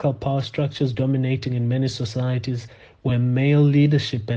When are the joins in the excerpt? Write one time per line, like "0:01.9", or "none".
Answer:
none